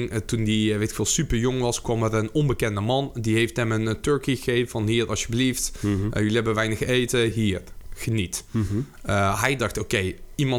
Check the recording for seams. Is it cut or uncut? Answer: uncut